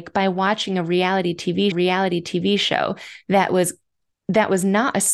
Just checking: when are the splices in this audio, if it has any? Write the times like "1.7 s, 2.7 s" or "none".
1.7 s